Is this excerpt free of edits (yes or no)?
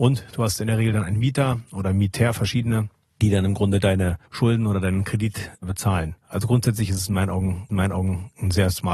no